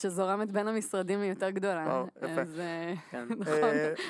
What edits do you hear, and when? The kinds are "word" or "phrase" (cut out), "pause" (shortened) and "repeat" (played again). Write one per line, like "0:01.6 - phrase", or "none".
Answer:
none